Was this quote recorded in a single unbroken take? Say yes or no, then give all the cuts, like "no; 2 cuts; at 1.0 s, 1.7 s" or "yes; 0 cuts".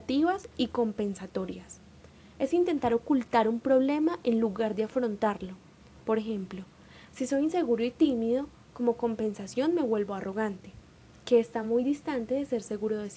yes; 0 cuts